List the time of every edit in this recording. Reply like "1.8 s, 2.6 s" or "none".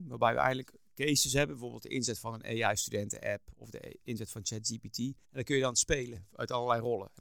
5.2 s

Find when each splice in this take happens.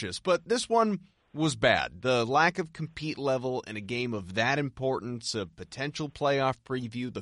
none

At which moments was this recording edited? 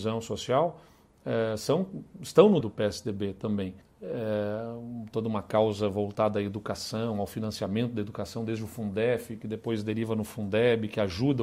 2.6 s, 3.8 s

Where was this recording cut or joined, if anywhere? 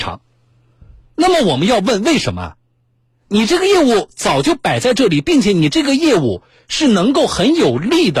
none

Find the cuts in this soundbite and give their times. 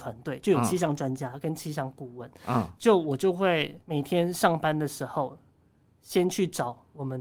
3.8 s

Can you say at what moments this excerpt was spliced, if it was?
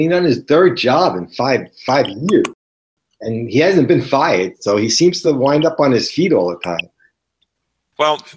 none

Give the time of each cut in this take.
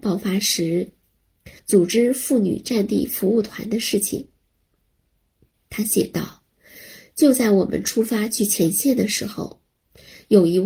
1.6 s

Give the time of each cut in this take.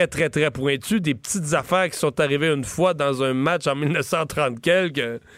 none

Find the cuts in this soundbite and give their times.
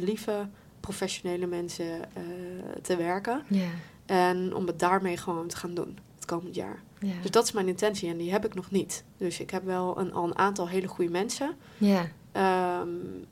6.1 s

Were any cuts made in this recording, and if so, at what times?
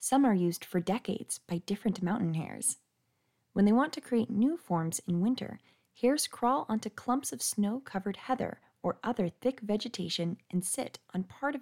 none

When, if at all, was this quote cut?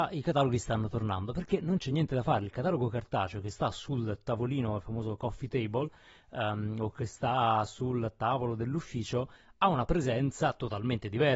none

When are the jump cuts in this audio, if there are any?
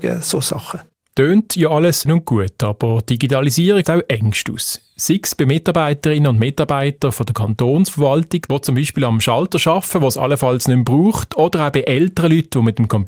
2.1 s, 3.8 s

